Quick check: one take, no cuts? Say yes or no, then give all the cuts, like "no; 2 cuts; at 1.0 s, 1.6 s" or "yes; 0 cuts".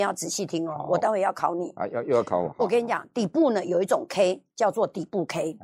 yes; 0 cuts